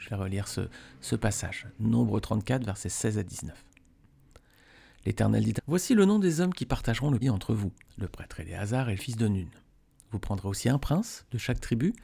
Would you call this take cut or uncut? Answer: cut